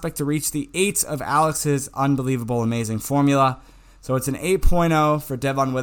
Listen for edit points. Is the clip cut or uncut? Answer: uncut